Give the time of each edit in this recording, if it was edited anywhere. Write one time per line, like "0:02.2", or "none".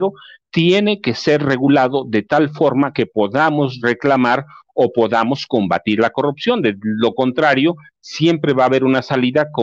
none